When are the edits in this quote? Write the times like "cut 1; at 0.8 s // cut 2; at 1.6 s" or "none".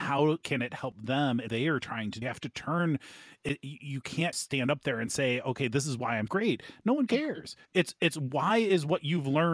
cut 1; at 1.5 s // cut 2; at 2.2 s // cut 3; at 4.3 s // cut 4; at 6.3 s // cut 5; at 7.7 s